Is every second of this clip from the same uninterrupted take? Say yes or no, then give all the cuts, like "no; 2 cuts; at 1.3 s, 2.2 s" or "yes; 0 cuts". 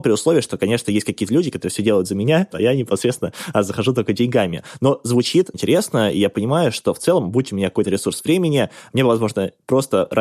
no; 3 cuts; at 2.5 s, 5.5 s, 7.8 s